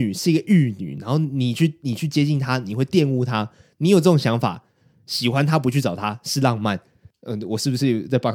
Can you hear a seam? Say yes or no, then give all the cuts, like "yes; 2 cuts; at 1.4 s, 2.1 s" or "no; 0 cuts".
no; 0 cuts